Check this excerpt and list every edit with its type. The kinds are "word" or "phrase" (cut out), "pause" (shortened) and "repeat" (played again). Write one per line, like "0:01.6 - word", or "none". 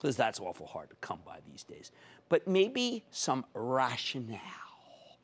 none